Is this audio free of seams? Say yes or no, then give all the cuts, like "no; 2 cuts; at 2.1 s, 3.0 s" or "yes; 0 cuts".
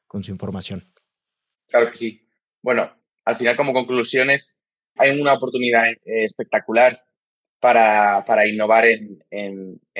yes; 0 cuts